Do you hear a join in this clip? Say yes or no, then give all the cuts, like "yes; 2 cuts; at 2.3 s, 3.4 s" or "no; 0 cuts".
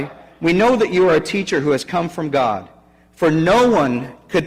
no; 0 cuts